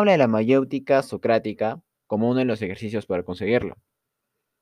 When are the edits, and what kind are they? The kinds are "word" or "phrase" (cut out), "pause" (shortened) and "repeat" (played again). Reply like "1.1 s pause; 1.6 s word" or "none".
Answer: none